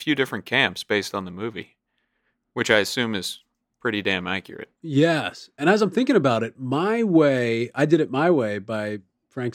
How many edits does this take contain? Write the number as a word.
zero